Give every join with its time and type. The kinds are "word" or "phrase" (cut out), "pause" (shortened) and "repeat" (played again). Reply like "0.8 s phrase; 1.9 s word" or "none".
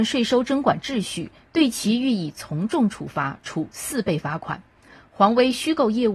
none